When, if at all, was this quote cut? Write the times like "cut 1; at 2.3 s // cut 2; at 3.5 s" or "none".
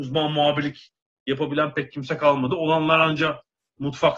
none